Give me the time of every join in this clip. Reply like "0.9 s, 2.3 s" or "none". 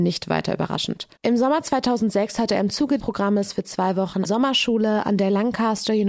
1.2 s, 3.0 s, 4.2 s

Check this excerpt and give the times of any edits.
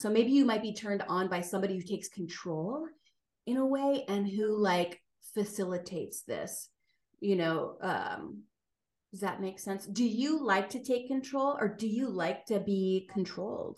none

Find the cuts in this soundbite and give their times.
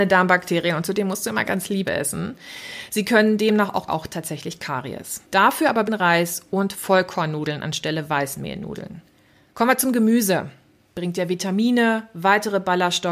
1.4 s, 1.8 s, 3.9 s, 5.2 s, 5.9 s, 9.3 s

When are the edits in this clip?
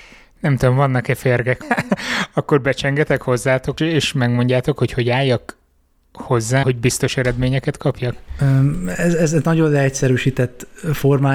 1.6 s, 3.8 s, 6.6 s

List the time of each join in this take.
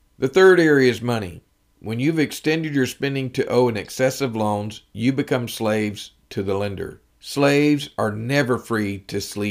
7.1 s

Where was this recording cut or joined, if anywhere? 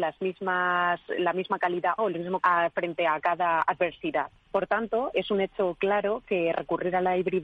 2.0 s, 2.4 s, 5.1 s

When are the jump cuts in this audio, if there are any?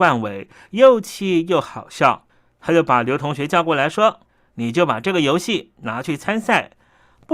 2.3 s, 4.3 s

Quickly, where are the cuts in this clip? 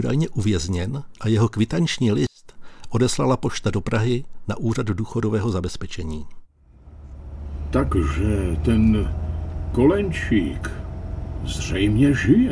none

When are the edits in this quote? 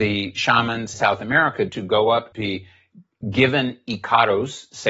0.9 s, 1.7 s, 2.3 s

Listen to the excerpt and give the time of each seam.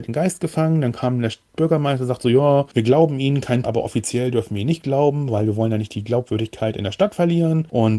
3.6 s

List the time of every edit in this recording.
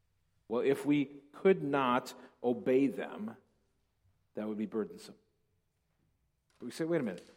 none

